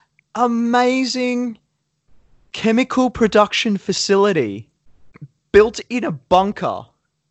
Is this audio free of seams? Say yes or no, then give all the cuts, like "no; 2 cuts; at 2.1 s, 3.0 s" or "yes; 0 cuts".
yes; 0 cuts